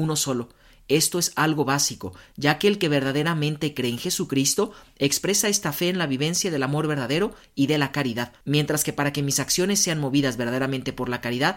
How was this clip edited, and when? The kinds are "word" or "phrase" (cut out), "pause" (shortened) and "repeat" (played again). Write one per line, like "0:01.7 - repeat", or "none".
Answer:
0:08.4 - pause